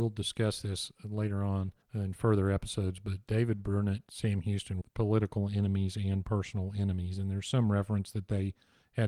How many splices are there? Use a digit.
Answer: 3